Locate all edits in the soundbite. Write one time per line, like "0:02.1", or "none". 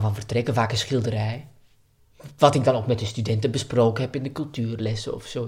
none